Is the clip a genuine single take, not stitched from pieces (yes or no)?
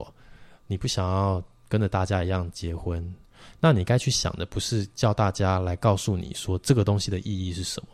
yes